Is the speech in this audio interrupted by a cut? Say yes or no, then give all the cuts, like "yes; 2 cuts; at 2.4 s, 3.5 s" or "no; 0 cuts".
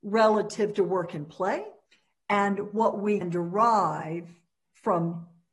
yes; 2 cuts; at 1.9 s, 3.2 s